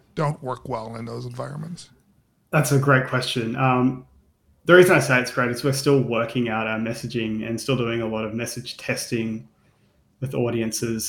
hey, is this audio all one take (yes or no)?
yes